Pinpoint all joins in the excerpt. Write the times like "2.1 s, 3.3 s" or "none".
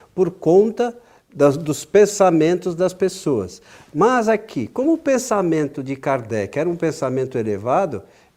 none